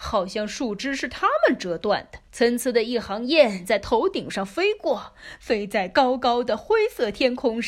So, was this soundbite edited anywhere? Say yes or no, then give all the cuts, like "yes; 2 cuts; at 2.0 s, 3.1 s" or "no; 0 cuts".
yes; 1 cut; at 2.3 s